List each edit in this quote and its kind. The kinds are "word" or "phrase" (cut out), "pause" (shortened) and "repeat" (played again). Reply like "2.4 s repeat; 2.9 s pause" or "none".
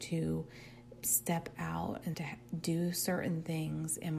1.0 s word; 2.1 s phrase